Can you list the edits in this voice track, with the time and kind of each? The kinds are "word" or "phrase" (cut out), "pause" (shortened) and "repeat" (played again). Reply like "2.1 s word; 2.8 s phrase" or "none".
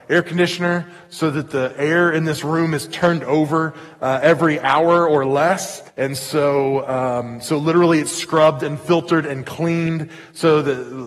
5.9 s pause